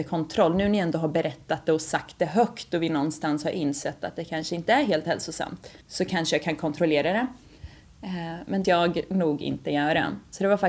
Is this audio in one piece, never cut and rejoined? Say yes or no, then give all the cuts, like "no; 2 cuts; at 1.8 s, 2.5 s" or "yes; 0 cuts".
no; 2 cuts; at 5.8 s, 8.6 s